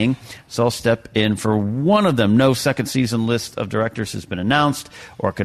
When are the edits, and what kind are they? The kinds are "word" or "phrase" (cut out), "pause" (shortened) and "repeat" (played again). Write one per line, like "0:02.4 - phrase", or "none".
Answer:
none